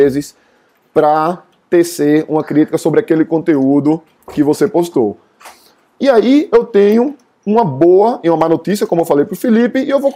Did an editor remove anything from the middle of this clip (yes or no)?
no